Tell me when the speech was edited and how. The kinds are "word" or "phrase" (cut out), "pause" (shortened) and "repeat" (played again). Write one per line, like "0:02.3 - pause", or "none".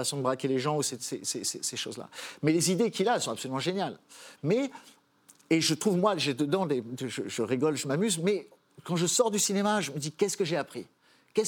none